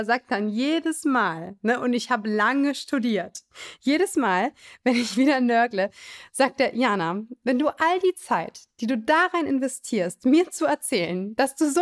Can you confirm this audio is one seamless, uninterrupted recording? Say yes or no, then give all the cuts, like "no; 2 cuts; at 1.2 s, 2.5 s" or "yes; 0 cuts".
yes; 0 cuts